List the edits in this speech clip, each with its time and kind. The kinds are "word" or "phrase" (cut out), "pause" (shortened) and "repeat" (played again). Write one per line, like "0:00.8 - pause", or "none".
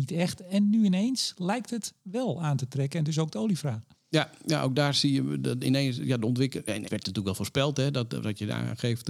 0:06.8 - phrase